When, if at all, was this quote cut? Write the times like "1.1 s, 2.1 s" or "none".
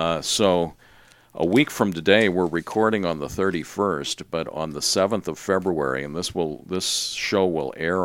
none